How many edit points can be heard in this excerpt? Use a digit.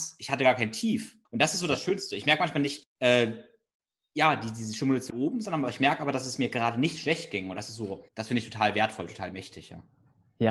4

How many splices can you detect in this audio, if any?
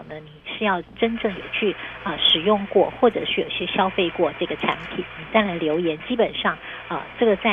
1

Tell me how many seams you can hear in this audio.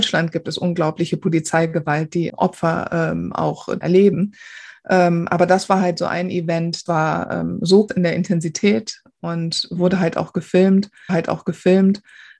5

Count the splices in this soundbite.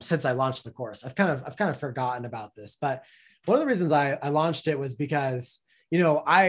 0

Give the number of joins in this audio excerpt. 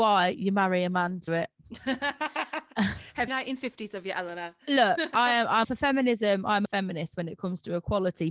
5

